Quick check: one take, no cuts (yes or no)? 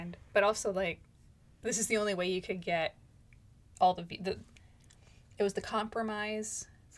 yes